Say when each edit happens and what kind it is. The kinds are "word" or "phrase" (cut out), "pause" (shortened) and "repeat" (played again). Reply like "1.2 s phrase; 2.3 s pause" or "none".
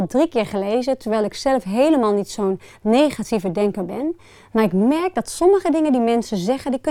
none